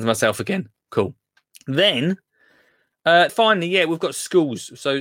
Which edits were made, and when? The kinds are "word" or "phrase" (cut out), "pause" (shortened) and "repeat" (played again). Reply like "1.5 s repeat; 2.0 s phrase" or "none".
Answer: 1.4 s pause; 3.3 s word